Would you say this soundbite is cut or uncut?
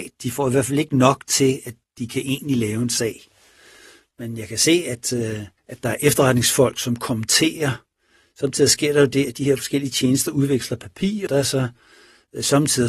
cut